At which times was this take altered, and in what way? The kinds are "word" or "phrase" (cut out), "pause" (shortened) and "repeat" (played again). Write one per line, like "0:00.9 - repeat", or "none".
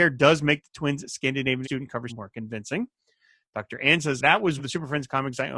0:01.6 - word
0:02.1 - word
0:04.2 - word
0:04.6 - word